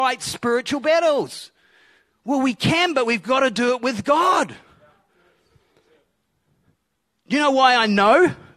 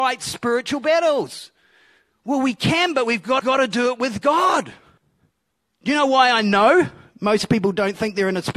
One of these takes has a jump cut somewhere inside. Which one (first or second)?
second